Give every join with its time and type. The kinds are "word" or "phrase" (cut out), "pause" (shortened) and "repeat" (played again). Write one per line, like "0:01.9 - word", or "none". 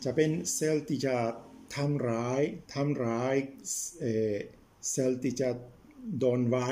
0:02.6 - pause